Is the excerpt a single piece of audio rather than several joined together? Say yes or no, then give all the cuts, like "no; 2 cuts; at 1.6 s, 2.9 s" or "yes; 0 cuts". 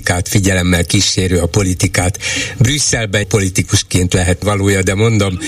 no; 2 cuts; at 3.2 s, 4.4 s